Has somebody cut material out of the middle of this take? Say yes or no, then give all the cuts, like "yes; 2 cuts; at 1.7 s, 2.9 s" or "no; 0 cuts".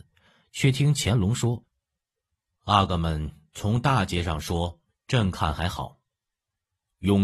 no; 0 cuts